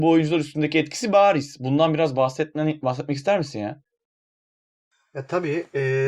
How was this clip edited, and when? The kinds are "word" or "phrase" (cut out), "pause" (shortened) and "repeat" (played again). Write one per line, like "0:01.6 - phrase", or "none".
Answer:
none